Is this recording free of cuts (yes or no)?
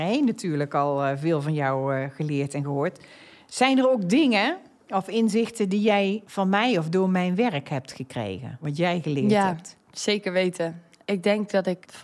yes